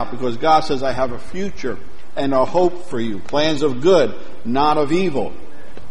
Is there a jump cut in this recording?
no; 0 cuts

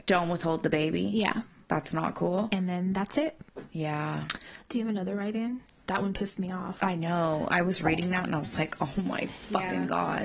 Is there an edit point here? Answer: no; 0 cuts

